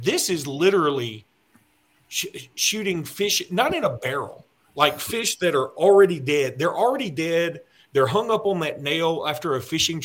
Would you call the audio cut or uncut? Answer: uncut